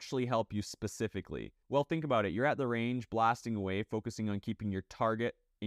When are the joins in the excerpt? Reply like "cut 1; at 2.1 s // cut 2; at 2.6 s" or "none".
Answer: cut 1; at 1.6 s